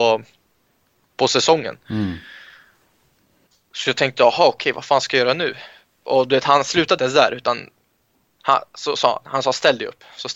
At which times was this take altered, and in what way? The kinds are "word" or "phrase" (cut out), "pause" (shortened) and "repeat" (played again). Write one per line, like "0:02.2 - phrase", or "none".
0:07.0 - word

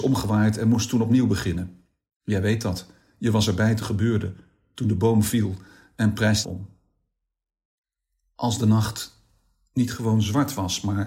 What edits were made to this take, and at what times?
0:03.8 - word
0:06.4 - phrase

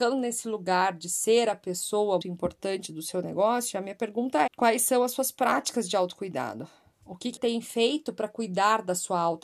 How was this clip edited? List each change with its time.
0:02.2 - word
0:04.5 - word
0:07.4 - word

